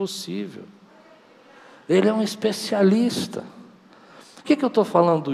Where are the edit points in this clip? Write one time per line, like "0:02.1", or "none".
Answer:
0:04.4